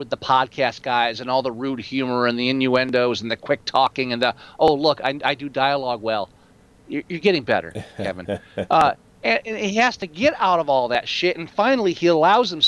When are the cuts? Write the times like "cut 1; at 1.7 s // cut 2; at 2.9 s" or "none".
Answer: none